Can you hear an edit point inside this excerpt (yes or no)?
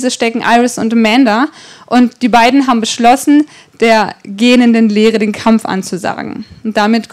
no